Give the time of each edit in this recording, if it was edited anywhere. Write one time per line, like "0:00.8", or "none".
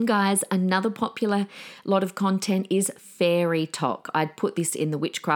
none